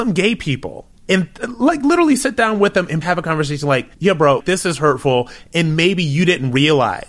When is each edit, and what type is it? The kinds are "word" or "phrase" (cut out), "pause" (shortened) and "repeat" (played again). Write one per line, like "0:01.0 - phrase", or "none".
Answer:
0:01.0 - pause
0:03.0 - phrase
0:03.9 - pause
0:04.4 - word